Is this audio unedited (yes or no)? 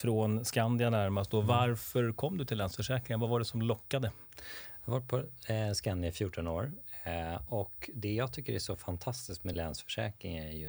yes